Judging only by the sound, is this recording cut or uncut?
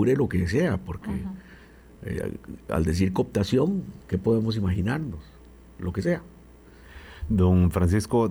uncut